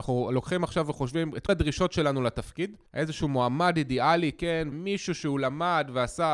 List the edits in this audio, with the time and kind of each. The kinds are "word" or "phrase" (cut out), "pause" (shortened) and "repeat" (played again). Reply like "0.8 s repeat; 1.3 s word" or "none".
1.5 s word; 2.9 s pause; 4.7 s word